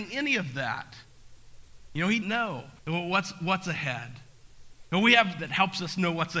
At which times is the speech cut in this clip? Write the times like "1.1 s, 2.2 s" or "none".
2.2 s, 2.8 s, 5.4 s